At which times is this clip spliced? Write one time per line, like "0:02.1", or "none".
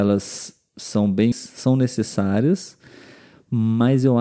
0:01.3